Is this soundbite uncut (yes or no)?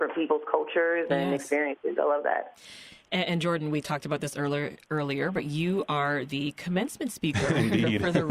yes